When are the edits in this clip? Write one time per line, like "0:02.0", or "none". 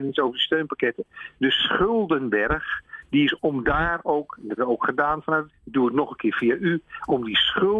0:03.4
0:04.6
0:05.5